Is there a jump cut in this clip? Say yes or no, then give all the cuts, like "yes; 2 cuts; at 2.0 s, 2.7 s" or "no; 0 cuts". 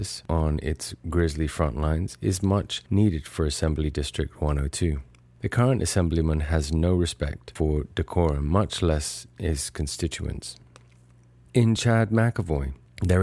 no; 0 cuts